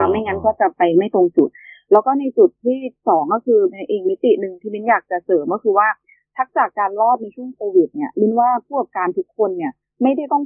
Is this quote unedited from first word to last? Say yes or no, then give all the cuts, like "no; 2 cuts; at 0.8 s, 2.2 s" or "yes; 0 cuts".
yes; 0 cuts